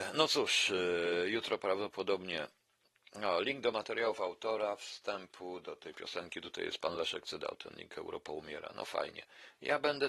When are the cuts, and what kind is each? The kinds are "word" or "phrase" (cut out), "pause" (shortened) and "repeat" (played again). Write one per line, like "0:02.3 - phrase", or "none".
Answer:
none

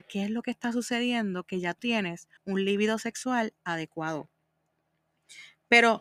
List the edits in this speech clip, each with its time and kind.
0:01.8 - word
0:02.4 - pause

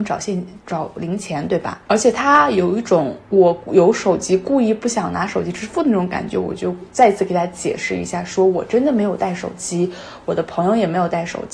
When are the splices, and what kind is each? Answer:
0:03.2 - pause

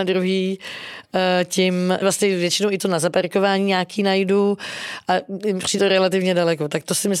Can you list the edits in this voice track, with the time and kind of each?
0:02.0 - phrase
0:02.8 - word
0:05.8 - word

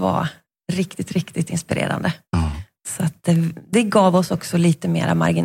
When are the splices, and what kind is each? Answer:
none

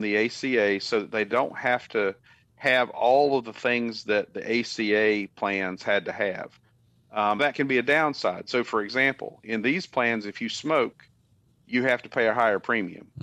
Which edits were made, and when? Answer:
0:07.4 - word

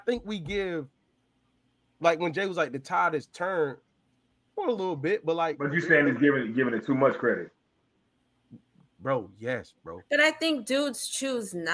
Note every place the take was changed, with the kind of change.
none

